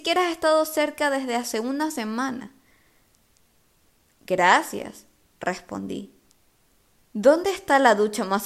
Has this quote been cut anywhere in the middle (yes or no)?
no